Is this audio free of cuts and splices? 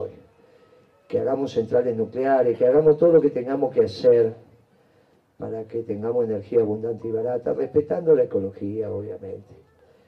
yes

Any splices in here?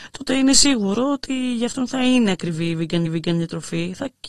yes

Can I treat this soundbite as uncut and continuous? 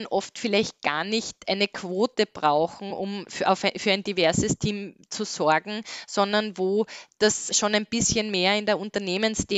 yes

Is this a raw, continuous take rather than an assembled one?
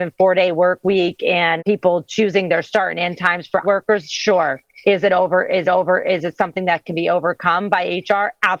no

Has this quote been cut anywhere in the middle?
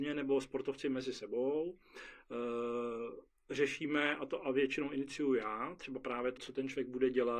yes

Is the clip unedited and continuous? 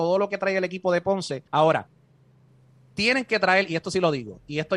no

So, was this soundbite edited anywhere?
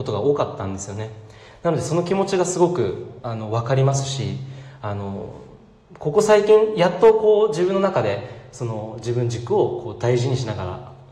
no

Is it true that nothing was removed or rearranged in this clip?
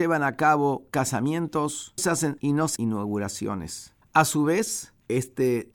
no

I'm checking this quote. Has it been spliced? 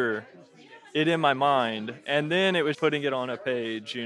yes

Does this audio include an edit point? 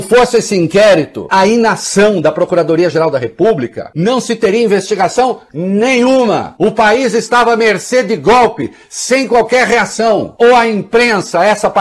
yes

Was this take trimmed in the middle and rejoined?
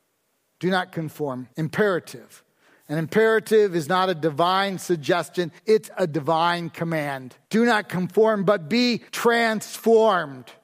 yes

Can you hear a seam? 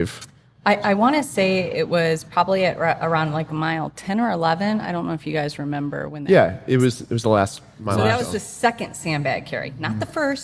no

